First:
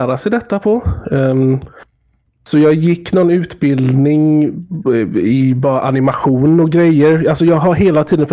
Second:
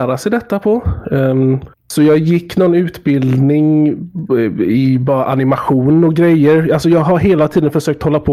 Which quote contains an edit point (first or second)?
second